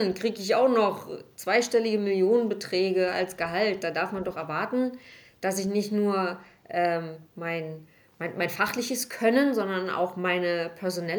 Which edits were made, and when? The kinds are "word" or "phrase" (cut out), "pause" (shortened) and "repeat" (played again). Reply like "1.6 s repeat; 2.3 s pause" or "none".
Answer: none